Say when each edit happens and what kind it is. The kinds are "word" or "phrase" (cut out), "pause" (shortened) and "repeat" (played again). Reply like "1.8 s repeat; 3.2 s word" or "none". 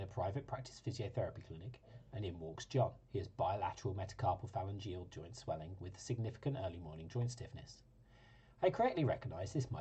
3.0 s pause